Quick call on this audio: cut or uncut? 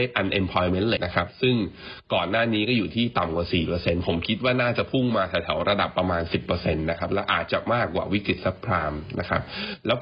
cut